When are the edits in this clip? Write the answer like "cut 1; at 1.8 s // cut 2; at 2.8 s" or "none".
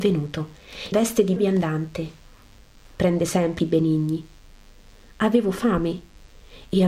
cut 1; at 0.9 s // cut 2; at 1.4 s // cut 3; at 3.6 s